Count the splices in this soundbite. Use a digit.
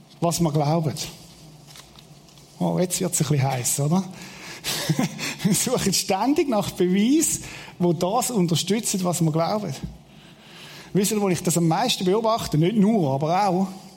0